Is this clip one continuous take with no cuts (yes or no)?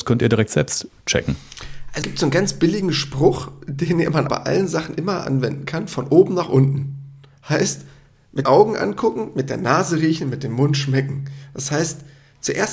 no